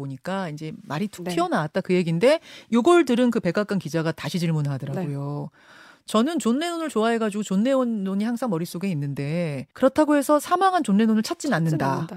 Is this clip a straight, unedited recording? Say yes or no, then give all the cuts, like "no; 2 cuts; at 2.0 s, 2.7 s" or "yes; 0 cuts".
no; 1 cut; at 9.7 s